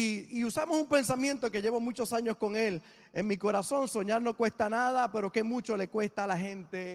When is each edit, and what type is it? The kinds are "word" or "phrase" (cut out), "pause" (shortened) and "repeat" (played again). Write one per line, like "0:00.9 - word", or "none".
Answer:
none